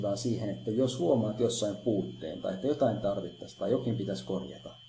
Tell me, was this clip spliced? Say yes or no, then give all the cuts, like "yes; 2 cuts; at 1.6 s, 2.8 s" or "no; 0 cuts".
no; 0 cuts